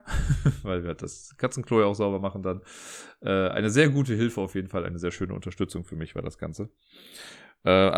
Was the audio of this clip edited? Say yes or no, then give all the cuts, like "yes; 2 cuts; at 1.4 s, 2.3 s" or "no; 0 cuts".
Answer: no; 0 cuts